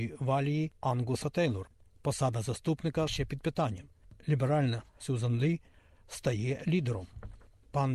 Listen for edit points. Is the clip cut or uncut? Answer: cut